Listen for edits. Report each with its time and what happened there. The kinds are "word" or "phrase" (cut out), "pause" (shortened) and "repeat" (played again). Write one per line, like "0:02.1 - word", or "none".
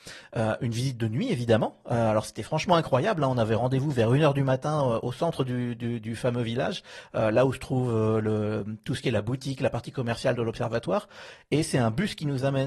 none

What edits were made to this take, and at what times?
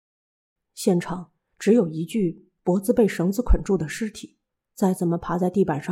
0:04.5 - pause

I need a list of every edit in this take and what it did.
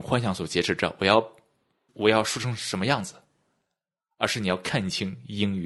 none

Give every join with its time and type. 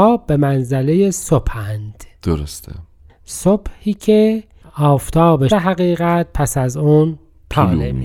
0:05.5 - word

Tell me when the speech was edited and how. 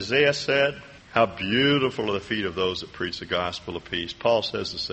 0:01.0 - pause

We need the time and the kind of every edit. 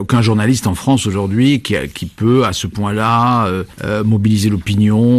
0:03.7 - pause

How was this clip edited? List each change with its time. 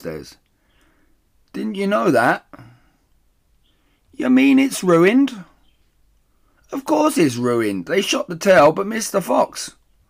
none

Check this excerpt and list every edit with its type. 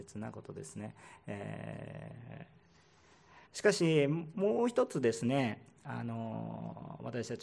0:03.5 - pause

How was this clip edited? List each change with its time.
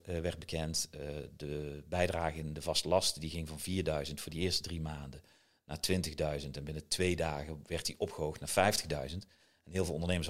none

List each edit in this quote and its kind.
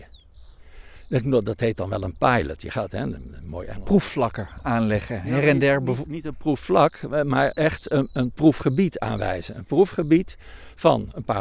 0:07.5 - word

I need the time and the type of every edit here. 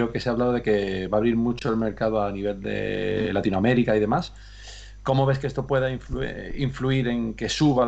none

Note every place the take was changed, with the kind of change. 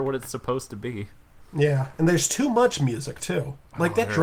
0:01.5 - pause

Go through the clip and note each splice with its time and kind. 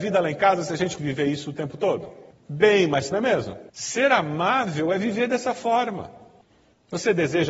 0:01.0 - word
0:03.1 - word
0:03.7 - pause

